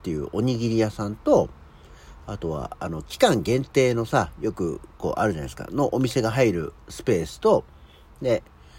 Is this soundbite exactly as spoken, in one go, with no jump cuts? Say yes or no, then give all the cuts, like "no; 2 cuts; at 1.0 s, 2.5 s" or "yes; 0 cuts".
no; 1 cut; at 6.8 s